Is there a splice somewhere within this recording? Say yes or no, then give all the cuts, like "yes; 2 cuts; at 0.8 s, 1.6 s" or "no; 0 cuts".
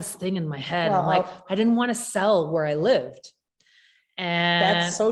no; 0 cuts